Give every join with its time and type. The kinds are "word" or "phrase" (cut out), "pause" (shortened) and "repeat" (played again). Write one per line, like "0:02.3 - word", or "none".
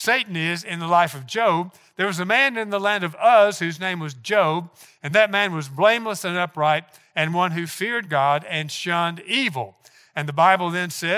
none